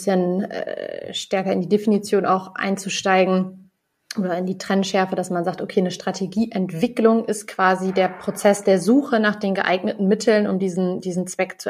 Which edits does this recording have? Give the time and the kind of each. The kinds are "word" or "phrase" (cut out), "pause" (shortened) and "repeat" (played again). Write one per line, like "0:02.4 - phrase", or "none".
none